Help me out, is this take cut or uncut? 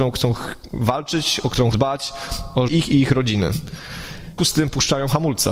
cut